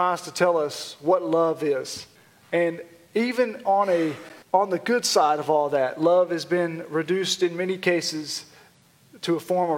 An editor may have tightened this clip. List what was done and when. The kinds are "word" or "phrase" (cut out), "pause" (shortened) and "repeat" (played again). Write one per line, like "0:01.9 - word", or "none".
0:02.2 - pause
0:04.4 - pause